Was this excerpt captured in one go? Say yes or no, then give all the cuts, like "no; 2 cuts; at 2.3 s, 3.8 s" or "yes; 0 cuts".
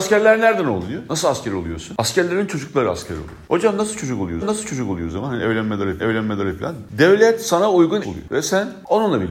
no; 3 cuts; at 4.4 s, 6.0 s, 8.0 s